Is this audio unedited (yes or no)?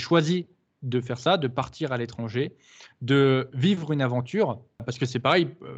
yes